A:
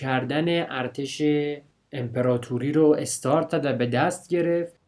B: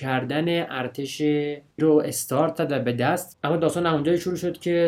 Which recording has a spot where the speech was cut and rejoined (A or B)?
B